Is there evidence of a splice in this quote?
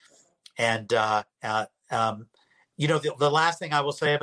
yes; 1 cut; at 1.3 s

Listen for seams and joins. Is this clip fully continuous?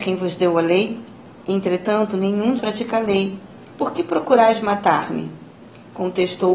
no; 1 cut; at 2.6 s

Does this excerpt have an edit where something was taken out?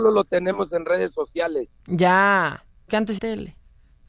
yes; 2 cuts; at 2.9 s, 3.2 s

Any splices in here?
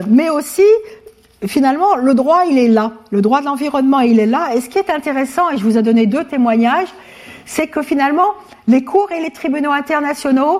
no; 0 cuts

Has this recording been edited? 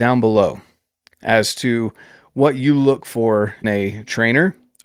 yes; 1 cut; at 3.6 s

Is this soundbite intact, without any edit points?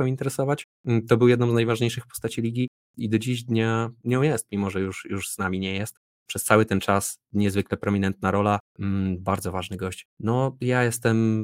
no; 2 cuts; at 5.0 s, 10.1 s

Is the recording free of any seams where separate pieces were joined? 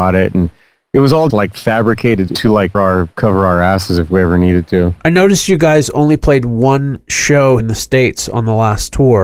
no; 4 cuts; at 1.3 s, 2.3 s, 2.7 s, 7.6 s

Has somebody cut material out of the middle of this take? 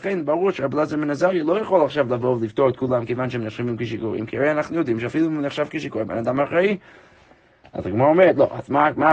no; 0 cuts

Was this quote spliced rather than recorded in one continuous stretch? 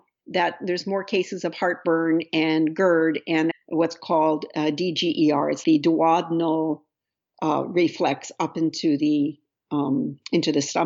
yes; 2 cuts; at 3.5 s, 5.6 s

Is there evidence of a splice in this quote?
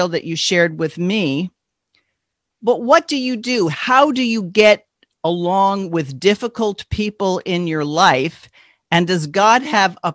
no; 0 cuts

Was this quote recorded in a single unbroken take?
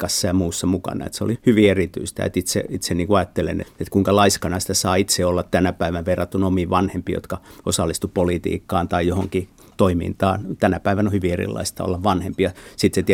no; 2 cuts; at 1.3 s, 3.6 s

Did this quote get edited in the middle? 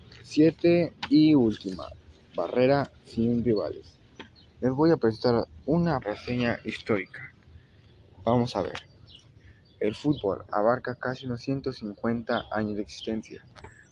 yes; 1 cut; at 6.0 s

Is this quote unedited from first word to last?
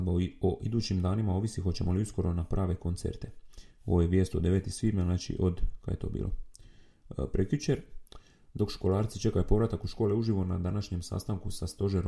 yes; 0 cuts

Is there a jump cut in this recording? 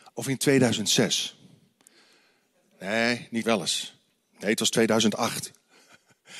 yes; 1 cut; at 3.4 s

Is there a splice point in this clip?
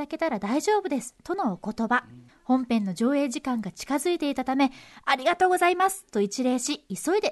yes; 1 cut; at 2.3 s

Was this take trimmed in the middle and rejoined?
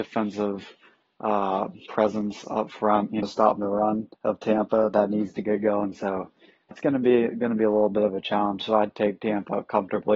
yes; 3 cuts; at 3.2 s, 4.1 s, 6.7 s

